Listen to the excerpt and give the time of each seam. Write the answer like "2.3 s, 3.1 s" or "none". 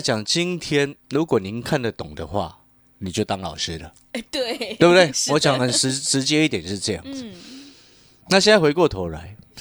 1.0 s